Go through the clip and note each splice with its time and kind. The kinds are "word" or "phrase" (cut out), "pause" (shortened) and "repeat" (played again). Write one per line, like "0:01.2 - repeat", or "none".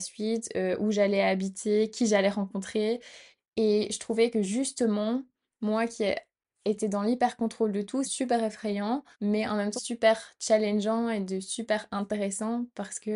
0:08.0 - phrase
0:09.1 - pause
0:09.8 - word